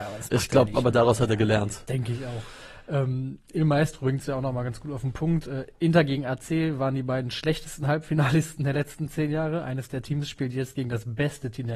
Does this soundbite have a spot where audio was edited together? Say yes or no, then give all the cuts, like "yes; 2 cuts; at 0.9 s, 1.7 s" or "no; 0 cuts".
no; 0 cuts